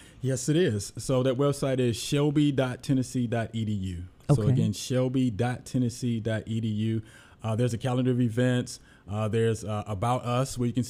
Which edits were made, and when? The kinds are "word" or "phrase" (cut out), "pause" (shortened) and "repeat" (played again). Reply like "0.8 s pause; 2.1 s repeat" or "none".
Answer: none

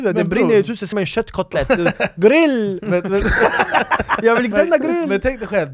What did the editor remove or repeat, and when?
0.9 s word; 4.5 s word

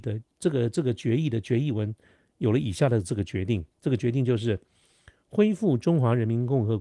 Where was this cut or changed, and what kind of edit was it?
3.7 s pause

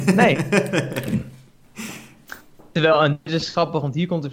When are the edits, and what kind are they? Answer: none

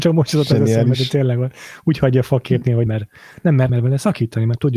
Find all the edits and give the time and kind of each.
2.9 s word; 3.7 s word

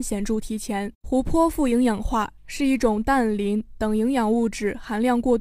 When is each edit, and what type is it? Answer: 1.0 s pause

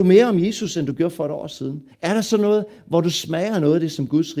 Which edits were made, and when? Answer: 1.9 s pause

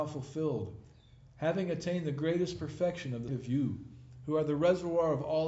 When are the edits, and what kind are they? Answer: 3.3 s word

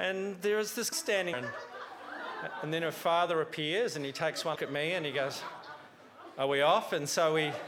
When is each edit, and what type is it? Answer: 0.9 s word; 1.3 s word; 4.5 s word

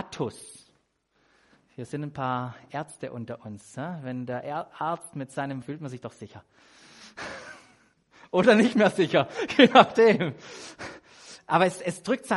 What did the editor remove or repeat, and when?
5.6 s phrase

